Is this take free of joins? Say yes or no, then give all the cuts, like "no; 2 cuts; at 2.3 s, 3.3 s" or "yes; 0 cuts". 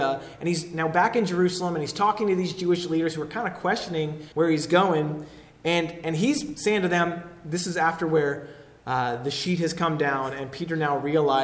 no; 1 cut; at 4.3 s